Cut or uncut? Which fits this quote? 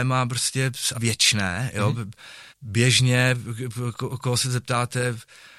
cut